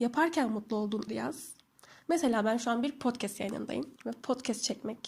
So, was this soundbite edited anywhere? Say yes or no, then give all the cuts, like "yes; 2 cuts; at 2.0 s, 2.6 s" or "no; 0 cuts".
yes; 2 cuts; at 1.1 s, 4.0 s